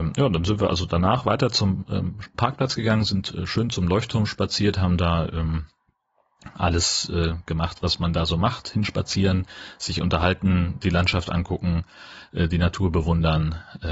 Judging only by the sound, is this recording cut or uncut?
uncut